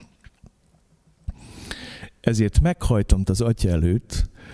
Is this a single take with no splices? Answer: no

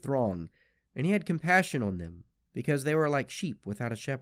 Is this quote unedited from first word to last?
no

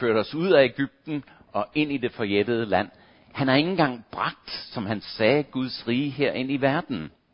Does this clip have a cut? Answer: no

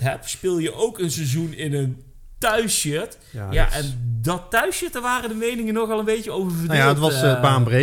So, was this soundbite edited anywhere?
no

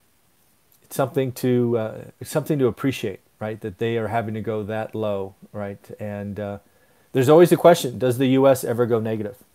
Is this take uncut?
yes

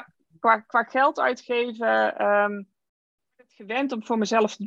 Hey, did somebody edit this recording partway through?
yes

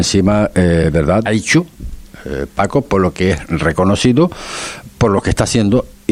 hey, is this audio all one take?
no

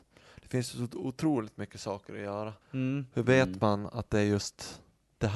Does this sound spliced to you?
yes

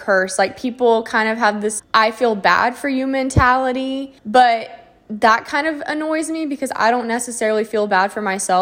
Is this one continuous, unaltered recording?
no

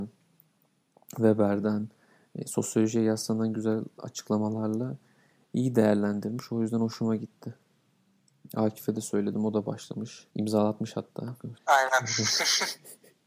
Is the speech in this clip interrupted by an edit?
yes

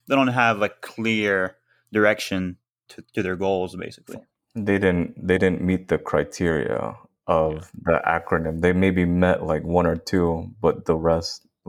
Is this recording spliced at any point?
no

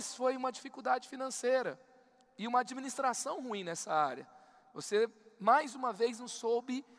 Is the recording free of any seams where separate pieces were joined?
yes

